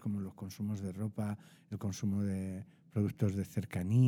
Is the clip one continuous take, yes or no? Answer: yes